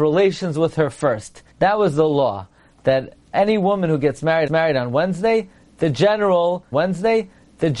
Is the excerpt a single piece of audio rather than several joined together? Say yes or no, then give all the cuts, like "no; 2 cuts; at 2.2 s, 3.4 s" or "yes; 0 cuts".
no; 4 cuts; at 1.5 s, 3.3 s, 4.5 s, 6.7 s